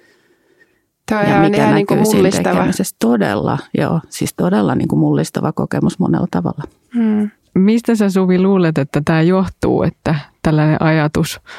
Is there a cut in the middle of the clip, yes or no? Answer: no